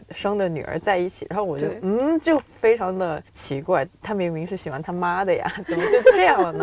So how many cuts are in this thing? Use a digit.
1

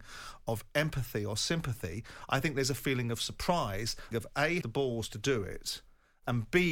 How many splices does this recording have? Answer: 2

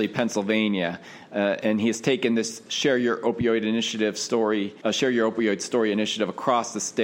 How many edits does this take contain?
1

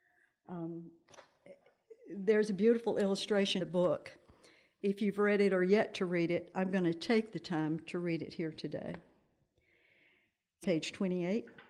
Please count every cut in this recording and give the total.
3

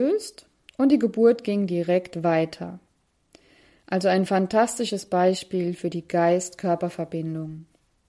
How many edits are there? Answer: 0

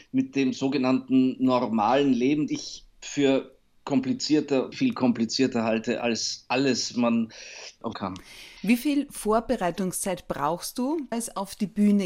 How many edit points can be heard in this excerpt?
6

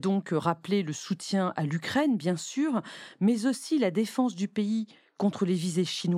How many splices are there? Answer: 0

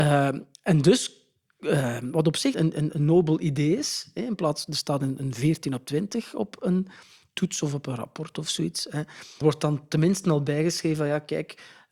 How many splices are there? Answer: 2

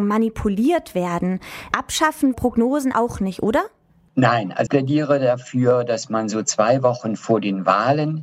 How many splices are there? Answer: 3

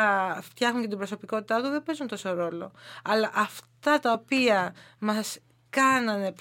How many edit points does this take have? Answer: 0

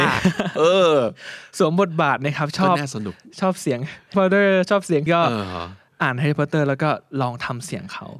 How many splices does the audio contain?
2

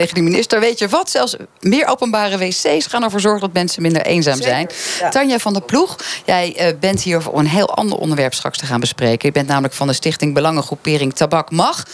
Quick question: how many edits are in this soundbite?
0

